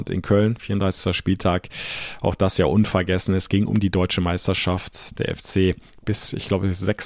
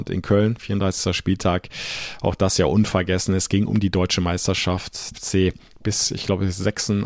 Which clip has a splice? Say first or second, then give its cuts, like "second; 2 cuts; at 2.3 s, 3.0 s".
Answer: second; 1 cut; at 5.1 s